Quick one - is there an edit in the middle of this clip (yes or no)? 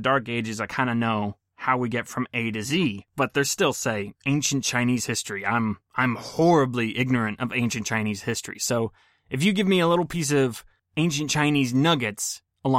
no